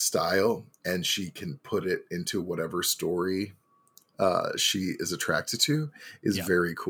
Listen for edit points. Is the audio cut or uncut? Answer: uncut